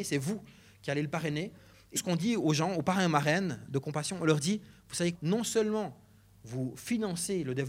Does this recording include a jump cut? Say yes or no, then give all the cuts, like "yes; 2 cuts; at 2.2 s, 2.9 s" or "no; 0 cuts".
yes; 2 cuts; at 2.0 s, 5.1 s